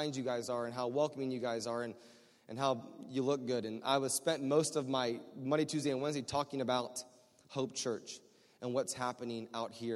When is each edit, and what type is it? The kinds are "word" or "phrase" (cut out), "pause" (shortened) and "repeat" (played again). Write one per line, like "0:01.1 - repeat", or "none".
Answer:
none